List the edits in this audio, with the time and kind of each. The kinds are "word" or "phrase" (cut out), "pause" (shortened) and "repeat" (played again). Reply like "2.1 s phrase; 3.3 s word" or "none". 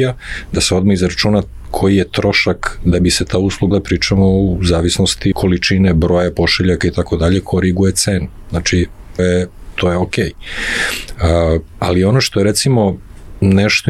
3.7 s phrase; 5.3 s word; 7.4 s phrase; 9.2 s word

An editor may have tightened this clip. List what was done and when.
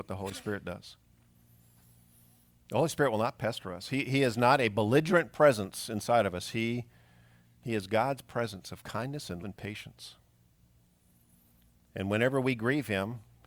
9.4 s word

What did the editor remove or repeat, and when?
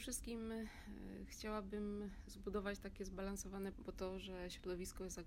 3.7 s word

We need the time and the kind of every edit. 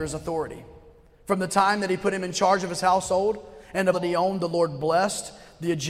3.9 s word

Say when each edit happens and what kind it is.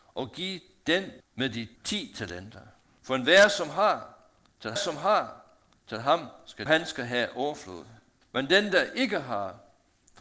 1.2 s phrase; 1.8 s pause; 2.8 s pause; 4.8 s repeat; 6.7 s phrase; 8.2 s pause

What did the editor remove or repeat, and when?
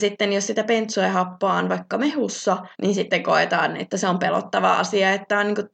2.7 s pause

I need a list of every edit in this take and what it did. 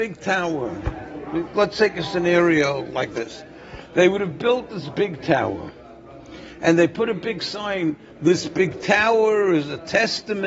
1.5 s word

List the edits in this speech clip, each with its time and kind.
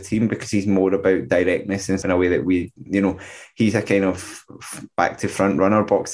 2.0 s word; 2.8 s pause

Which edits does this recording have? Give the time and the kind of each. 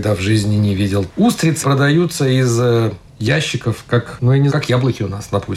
1.6 s word; 3.1 s pause; 4.5 s word

